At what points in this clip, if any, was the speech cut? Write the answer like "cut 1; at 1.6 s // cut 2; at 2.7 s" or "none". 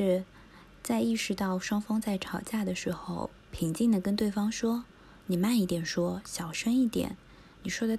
cut 1; at 3.4 s // cut 2; at 4.9 s